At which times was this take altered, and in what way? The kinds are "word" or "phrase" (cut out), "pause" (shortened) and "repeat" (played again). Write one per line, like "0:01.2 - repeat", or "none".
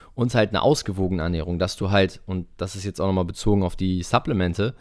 none